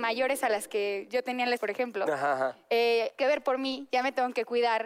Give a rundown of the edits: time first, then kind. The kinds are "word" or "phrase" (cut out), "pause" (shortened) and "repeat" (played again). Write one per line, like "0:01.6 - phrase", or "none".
0:01.6 - word
0:03.2 - phrase